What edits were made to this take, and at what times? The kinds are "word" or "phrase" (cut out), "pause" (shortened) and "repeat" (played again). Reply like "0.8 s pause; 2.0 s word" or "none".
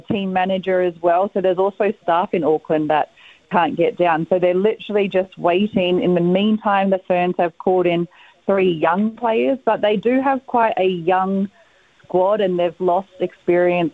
none